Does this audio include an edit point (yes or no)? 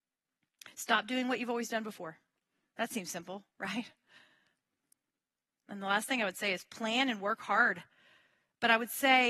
no